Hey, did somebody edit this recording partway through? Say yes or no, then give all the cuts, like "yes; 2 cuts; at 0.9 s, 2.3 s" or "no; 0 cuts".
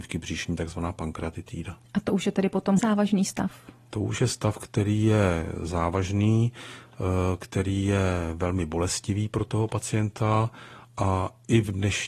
yes; 1 cut; at 2.8 s